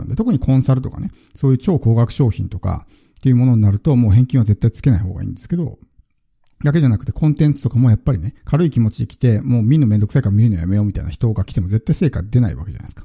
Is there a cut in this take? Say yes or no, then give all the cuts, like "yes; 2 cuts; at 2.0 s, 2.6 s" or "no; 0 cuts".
yes; 1 cut; at 8.4 s